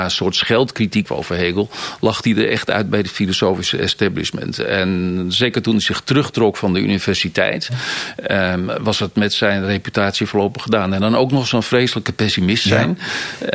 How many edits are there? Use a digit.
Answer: 1